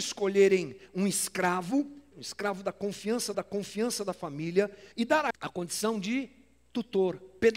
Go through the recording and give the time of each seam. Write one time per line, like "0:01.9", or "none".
0:02.1
0:03.3
0:04.9
0:05.3